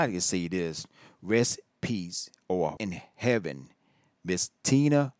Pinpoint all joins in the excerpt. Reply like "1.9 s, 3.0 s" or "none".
1.7 s, 2.8 s